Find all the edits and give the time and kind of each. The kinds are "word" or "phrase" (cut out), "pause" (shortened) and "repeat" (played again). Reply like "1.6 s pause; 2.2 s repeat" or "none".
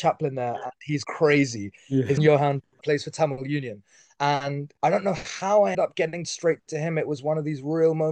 1.0 s word; 2.2 s word; 2.8 s word; 4.8 s pause; 5.7 s word; 6.2 s word